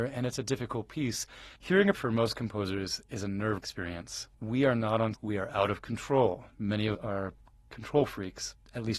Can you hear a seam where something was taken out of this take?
yes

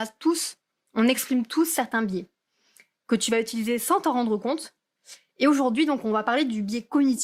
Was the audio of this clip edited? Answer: no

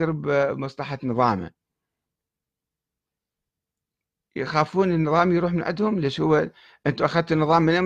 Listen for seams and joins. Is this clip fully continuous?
yes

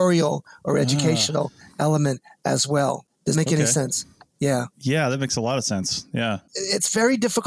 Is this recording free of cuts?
no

